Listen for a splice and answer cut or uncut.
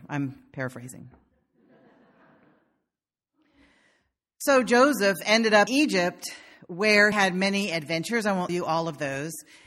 cut